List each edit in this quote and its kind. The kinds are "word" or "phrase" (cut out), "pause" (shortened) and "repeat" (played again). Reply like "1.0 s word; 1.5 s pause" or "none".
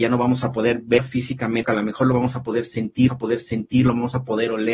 1.6 s word; 3.1 s repeat